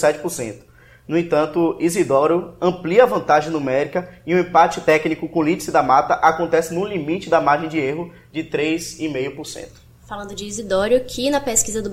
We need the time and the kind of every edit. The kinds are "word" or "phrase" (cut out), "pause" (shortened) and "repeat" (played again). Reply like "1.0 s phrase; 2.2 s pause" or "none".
none